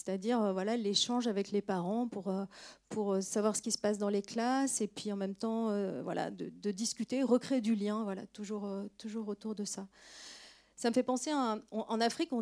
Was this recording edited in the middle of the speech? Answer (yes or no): no